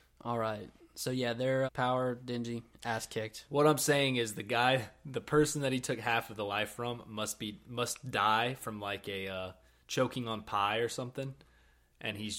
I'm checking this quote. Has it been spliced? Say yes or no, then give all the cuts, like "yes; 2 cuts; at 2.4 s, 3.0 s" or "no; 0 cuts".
yes; 1 cut; at 1.7 s